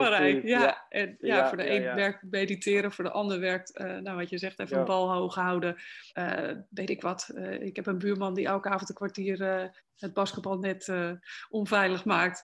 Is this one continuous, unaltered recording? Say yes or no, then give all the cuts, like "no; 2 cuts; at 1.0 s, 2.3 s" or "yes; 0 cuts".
no; 2 cuts; at 6.1 s, 9.8 s